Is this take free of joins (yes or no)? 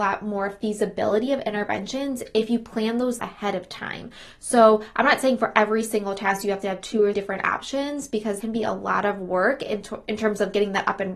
no